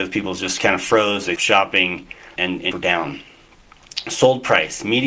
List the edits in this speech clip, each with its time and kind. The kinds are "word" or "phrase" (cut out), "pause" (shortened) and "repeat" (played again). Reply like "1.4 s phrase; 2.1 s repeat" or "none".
1.4 s word; 2.4 s word; 2.7 s word